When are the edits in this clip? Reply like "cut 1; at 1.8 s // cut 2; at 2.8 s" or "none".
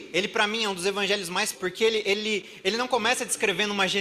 cut 1; at 1.5 s